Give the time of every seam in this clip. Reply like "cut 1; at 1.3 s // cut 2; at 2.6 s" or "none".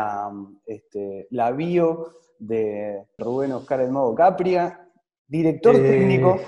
cut 1; at 3.2 s